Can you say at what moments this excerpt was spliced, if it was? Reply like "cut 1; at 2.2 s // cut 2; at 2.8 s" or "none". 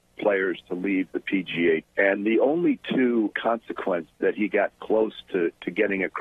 cut 1; at 1.8 s // cut 2; at 3.3 s